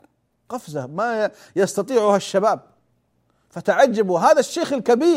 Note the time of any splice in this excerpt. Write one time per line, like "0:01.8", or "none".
none